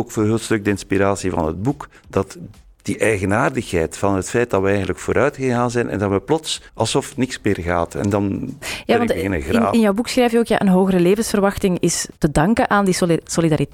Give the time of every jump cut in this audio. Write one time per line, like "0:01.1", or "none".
0:02.0
0:06.7
0:12.2